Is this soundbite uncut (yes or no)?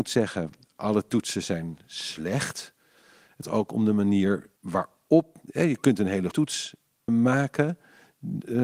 no